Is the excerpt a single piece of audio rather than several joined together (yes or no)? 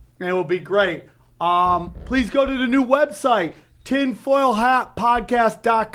yes